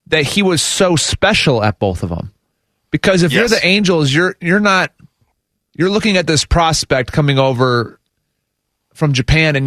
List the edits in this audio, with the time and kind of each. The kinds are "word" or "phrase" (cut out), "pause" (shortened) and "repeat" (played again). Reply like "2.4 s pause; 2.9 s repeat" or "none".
none